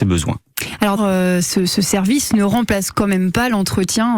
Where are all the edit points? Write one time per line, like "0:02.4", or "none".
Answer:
0:01.0